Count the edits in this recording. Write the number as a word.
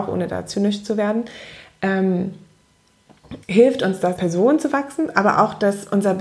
two